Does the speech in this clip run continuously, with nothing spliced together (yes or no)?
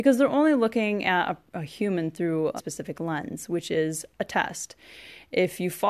no